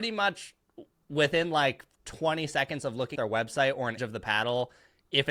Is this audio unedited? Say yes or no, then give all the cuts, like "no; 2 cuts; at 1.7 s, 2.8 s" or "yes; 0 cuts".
no; 2 cuts; at 3.2 s, 4.0 s